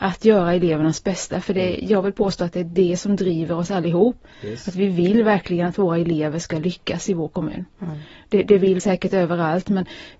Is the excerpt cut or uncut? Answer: cut